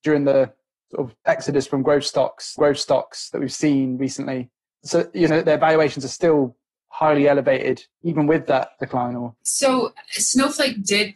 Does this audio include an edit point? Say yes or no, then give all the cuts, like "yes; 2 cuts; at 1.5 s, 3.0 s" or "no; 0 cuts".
yes; 6 cuts; at 1.2 s, 2.6 s, 4.7 s, 5.3 s, 7.9 s, 9.4 s